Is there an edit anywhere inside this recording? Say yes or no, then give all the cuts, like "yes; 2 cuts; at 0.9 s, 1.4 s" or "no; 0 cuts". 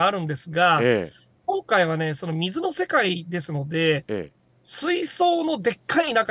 no; 0 cuts